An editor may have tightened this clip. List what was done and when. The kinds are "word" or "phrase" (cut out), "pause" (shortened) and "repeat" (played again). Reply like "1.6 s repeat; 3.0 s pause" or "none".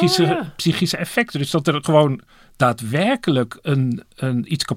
none